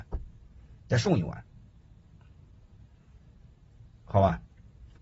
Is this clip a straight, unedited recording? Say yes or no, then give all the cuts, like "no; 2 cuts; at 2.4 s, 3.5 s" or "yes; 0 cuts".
yes; 0 cuts